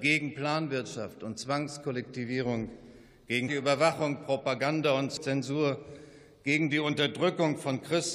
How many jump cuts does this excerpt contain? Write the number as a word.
one